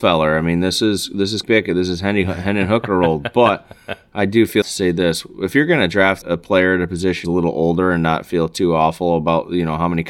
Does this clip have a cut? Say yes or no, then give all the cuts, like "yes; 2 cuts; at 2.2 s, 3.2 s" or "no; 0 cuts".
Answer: yes; 4 cuts; at 1.4 s, 4.6 s, 6.2 s, 7.2 s